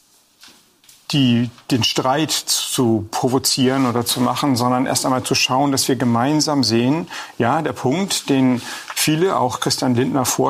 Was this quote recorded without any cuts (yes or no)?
yes